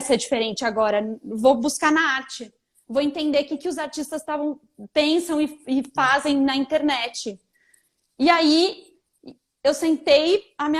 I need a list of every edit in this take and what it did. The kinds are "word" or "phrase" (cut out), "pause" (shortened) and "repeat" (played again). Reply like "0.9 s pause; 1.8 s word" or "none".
none